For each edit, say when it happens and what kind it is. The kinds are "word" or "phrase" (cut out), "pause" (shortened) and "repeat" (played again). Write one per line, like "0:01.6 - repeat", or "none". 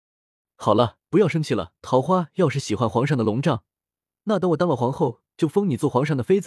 0:01.0 - pause
0:01.8 - pause